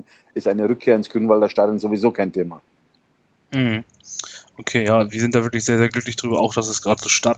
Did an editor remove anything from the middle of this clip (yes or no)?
no